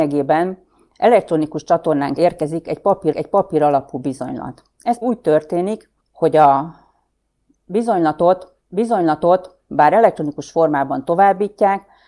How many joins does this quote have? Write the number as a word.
five